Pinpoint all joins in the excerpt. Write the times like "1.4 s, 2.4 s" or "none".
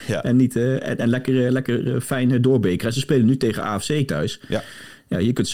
none